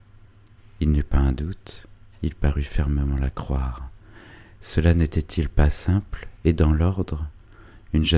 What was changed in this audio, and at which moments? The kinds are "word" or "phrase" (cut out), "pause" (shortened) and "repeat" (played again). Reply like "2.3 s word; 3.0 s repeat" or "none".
none